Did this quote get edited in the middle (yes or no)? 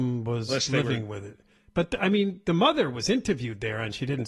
no